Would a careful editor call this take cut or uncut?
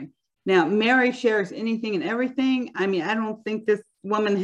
uncut